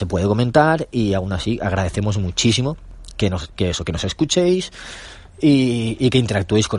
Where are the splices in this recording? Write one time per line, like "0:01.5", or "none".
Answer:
none